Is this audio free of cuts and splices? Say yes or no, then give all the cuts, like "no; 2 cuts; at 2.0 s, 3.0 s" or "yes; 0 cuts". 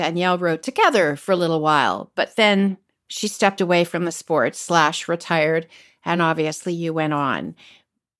yes; 0 cuts